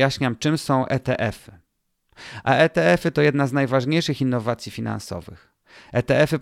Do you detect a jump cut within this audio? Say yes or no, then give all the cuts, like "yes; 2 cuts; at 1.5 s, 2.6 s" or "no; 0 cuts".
no; 0 cuts